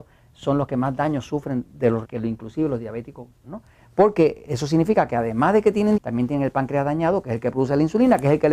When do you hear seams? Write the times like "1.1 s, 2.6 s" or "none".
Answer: 2.0 s, 3.4 s, 6.0 s